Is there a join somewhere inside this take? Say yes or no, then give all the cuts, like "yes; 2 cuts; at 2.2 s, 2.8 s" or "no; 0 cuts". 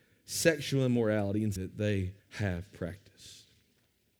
yes; 2 cuts; at 1.6 s, 2.2 s